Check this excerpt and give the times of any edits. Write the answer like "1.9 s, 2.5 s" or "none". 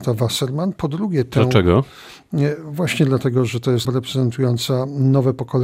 3.8 s